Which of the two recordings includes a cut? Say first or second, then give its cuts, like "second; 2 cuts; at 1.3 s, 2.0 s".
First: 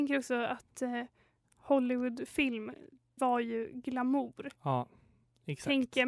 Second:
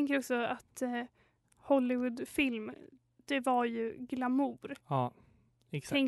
first; 1 cut; at 3.2 s